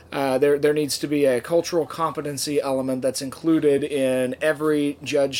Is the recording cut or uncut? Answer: uncut